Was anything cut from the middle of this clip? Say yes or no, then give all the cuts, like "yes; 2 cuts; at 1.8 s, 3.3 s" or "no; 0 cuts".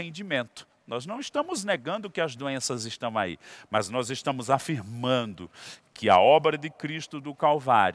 no; 0 cuts